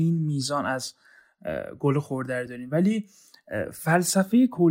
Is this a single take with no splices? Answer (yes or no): yes